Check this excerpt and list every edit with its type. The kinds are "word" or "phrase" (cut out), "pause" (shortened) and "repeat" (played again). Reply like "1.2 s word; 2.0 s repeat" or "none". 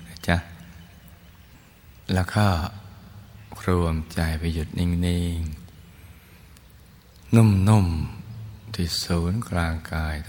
2.0 s pause